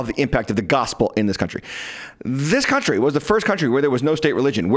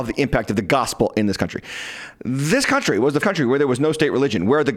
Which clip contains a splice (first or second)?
second